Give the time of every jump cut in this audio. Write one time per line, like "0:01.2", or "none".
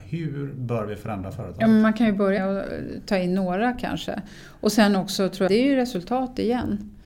0:02.4
0:05.5